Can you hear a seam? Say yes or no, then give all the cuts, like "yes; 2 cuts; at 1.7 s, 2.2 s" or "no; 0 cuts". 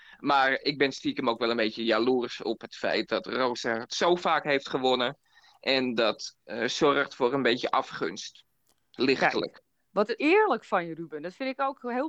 no; 0 cuts